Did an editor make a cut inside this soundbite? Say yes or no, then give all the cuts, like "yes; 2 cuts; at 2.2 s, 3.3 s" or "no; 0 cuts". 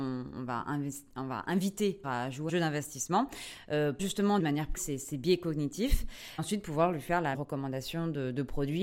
yes; 7 cuts; at 2.0 s, 2.5 s, 4.0 s, 4.4 s, 4.8 s, 6.4 s, 7.3 s